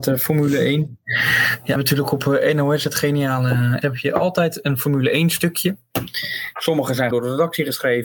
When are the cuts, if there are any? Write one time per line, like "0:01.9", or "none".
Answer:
0:01.8
0:03.8
0:07.1

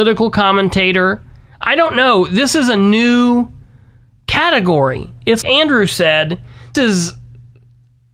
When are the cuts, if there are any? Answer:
0:05.4
0:06.7

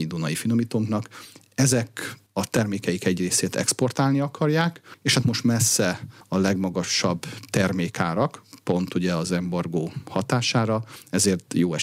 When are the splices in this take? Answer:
0:05.2

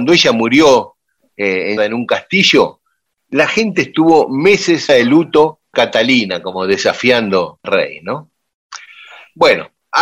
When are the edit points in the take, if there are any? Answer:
0:01.8
0:04.9
0:05.7
0:07.6

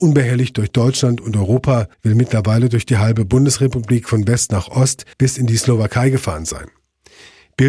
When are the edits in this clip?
0:01.9
0:05.1

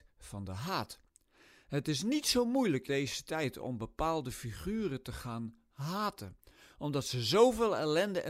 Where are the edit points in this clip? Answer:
0:02.9

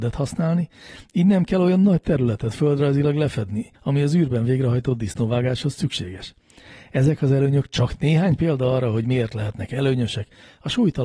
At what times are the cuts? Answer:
0:03.7

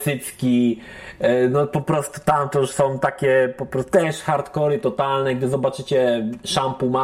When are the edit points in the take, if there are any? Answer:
none

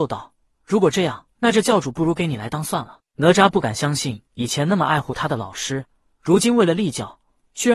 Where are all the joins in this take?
0:01.3
0:04.3

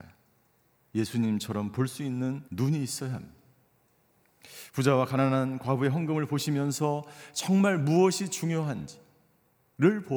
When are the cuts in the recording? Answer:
0:02.5

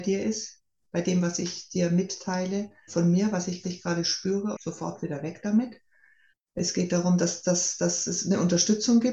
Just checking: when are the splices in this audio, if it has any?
0:02.9
0:03.6
0:04.5
0:06.3

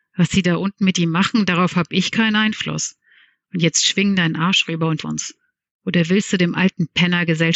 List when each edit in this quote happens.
0:05.0

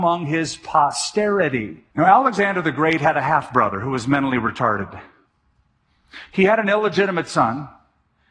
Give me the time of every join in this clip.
0:01.9

